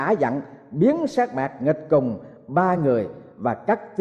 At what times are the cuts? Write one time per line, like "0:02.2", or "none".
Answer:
none